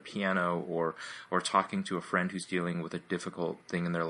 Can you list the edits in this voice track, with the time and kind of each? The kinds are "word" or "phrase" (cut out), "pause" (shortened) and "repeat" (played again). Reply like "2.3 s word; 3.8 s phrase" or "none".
none